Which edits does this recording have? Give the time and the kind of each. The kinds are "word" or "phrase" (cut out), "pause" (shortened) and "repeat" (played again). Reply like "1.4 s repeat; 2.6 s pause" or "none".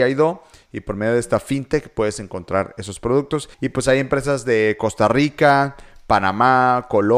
3.5 s pause